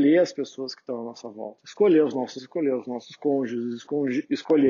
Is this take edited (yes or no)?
yes